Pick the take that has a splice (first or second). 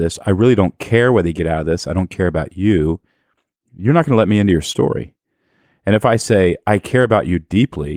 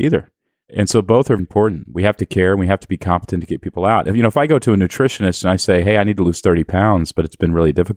second